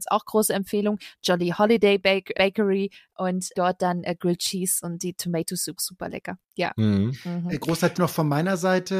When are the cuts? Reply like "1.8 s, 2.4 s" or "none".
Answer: 2.3 s, 3.5 s, 5.8 s, 7.9 s